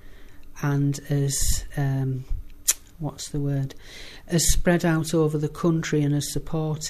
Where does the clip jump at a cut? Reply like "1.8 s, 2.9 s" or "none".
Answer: none